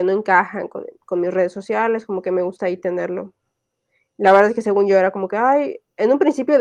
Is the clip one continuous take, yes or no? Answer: yes